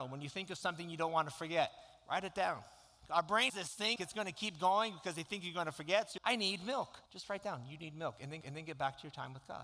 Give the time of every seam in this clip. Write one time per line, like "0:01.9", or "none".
0:03.5
0:04.0
0:06.2
0:07.1
0:08.4